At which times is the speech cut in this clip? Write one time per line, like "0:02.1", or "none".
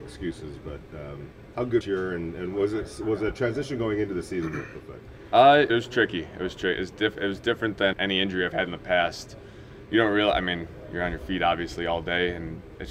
0:01.8
0:05.7
0:07.9